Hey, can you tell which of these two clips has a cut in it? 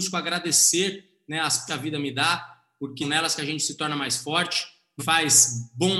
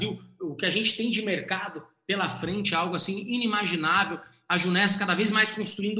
first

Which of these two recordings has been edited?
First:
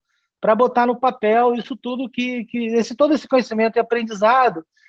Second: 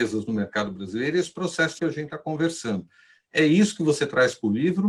second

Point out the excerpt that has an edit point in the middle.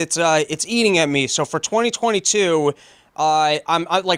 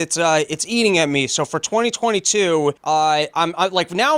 second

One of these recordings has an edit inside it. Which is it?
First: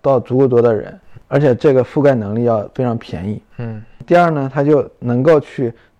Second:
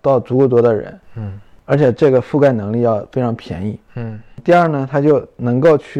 first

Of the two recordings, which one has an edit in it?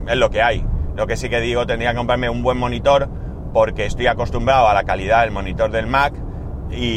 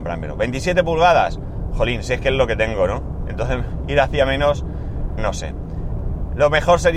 second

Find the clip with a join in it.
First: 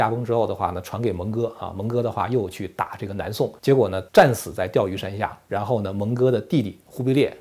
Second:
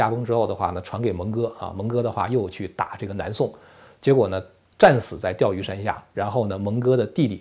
first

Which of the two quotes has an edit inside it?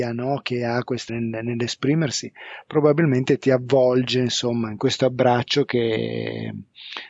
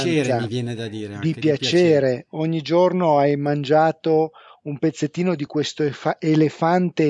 first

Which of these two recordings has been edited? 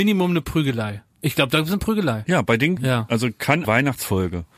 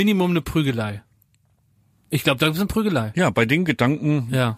first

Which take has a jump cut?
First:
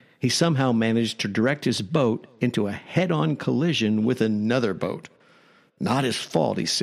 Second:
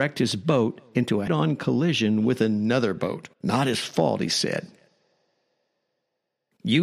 second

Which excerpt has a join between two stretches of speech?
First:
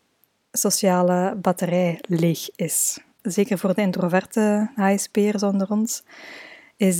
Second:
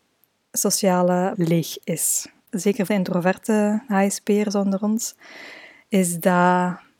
second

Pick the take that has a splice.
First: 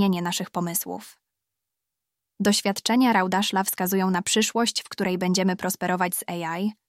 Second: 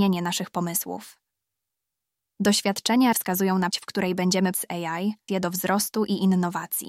second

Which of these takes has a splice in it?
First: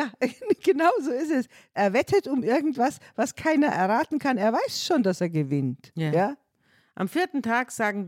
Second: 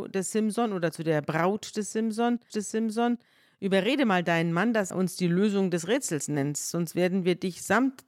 second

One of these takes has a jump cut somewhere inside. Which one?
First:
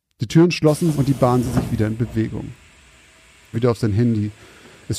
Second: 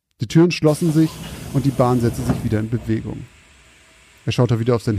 first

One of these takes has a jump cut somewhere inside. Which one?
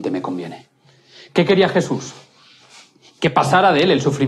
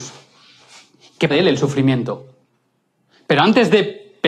second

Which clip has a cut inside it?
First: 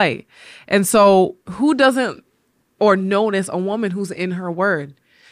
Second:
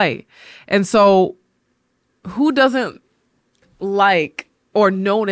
first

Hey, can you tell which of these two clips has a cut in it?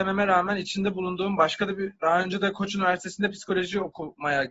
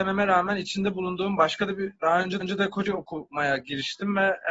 second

